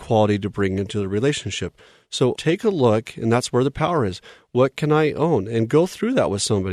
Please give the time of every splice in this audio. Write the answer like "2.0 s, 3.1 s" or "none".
2.4 s